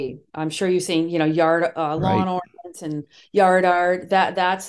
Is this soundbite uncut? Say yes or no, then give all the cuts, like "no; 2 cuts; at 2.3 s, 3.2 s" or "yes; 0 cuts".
yes; 0 cuts